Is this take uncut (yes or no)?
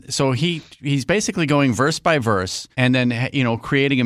no